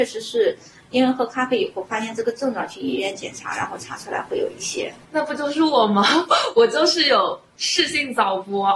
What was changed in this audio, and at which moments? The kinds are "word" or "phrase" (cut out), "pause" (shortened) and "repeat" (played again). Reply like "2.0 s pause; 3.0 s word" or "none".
5.0 s pause